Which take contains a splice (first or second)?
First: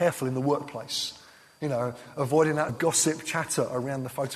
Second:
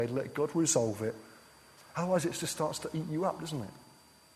first